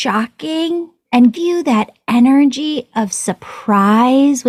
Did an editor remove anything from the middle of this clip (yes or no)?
yes